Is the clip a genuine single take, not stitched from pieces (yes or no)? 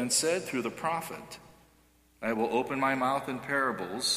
yes